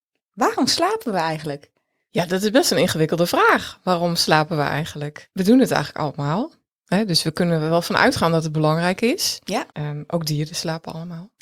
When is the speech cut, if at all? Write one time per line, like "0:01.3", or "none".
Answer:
0:09.7